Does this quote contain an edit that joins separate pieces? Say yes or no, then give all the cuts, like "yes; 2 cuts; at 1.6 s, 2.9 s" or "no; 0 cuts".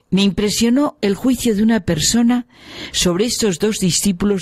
no; 0 cuts